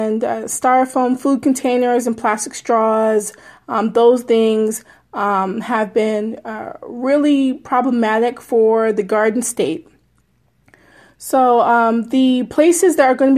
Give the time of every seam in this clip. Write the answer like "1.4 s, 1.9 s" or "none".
none